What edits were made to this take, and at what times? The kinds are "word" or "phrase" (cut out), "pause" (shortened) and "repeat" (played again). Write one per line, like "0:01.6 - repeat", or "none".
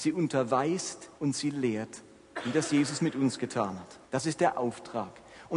0:01.2 - pause
0:04.0 - pause